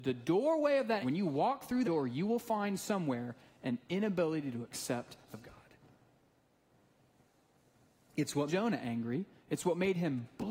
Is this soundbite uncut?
no; 4 cuts; at 1.0 s, 1.8 s, 5.3 s, 8.5 s

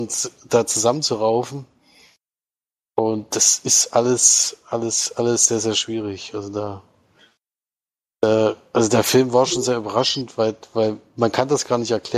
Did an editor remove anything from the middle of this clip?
no; 0 cuts

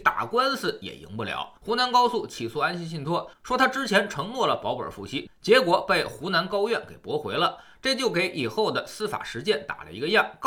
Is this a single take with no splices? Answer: no; 1 cut; at 1.6 s

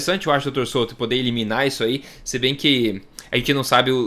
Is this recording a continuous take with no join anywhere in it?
yes; 0 cuts

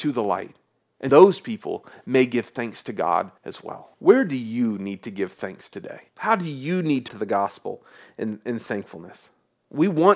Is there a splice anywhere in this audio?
yes; 5 cuts; at 1.1 s, 3.4 s, 3.9 s, 6.1 s, 7.1 s

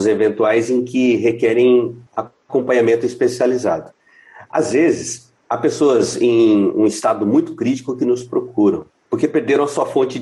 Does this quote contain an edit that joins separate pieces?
yes; 2 cuts; at 2.1 s, 5.4 s

